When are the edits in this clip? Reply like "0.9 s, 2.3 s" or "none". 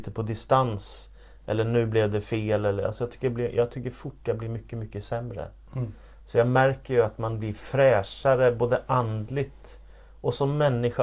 none